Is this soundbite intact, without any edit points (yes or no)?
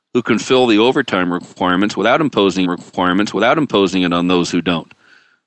no